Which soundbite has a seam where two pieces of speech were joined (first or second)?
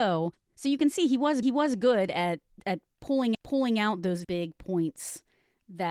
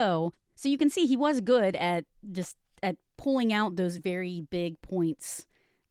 first